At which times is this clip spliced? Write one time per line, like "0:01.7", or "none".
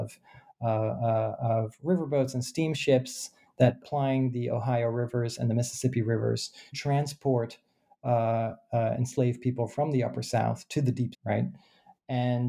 0:03.8
0:06.7
0:11.1